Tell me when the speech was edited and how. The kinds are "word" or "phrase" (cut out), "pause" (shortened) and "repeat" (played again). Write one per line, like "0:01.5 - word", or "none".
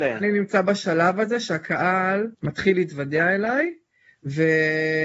0:02.3 - pause